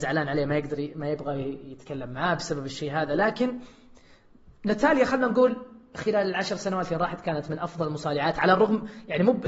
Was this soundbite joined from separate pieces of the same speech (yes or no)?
no